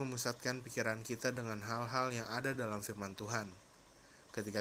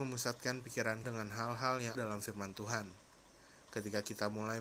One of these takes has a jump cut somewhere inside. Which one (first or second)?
second